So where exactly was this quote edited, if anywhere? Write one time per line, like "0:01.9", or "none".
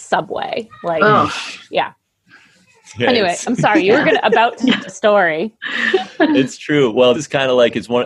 0:04.9
0:07.1